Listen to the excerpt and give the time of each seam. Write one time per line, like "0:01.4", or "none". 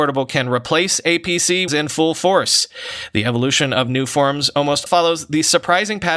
0:01.7
0:04.9